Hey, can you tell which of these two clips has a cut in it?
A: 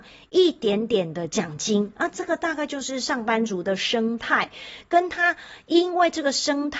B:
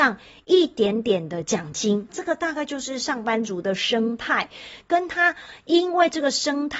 B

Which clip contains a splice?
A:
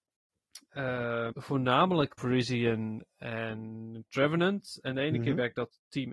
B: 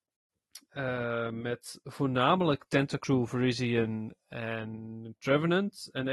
A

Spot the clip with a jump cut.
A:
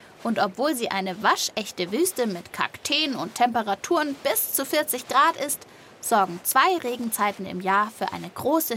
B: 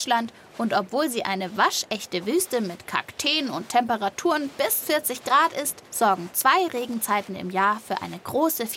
B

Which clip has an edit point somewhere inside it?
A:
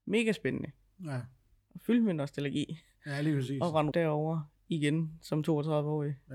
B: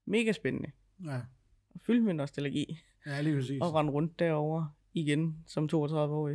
A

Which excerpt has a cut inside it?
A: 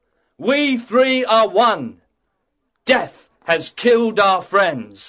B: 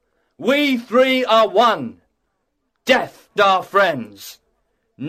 B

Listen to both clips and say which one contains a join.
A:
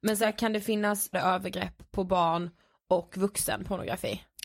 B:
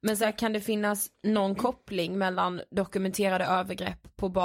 A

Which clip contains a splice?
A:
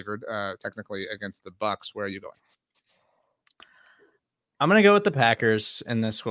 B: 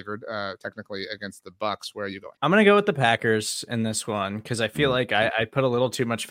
B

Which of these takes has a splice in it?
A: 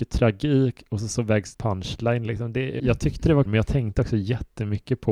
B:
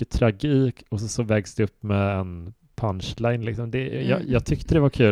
A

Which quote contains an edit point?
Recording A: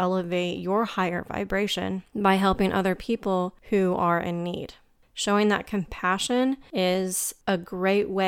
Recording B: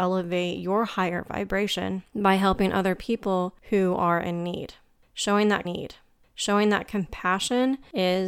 B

